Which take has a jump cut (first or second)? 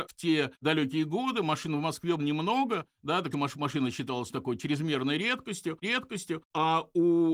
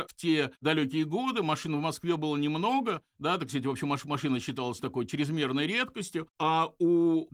first